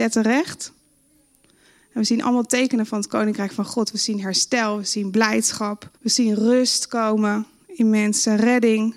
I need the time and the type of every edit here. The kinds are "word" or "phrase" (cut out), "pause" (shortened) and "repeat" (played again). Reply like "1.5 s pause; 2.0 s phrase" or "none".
6.0 s pause